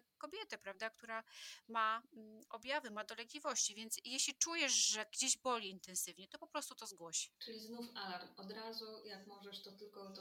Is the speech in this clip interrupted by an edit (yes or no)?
yes